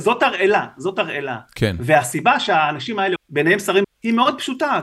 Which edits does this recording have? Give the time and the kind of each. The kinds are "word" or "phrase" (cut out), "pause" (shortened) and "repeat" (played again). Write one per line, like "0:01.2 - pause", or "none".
0:03.2 - phrase
0:03.8 - word